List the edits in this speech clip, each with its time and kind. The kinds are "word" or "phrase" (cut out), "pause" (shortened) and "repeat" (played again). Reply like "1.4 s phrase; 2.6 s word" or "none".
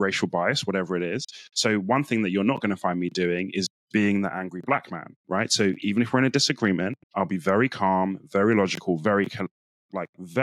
7.0 s pause